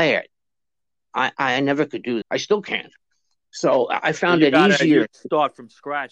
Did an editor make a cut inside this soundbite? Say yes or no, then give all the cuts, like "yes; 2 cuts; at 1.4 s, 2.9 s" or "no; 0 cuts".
yes; 1 cut; at 2.2 s